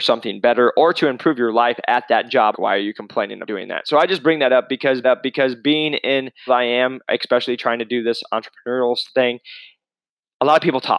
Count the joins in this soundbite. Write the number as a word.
four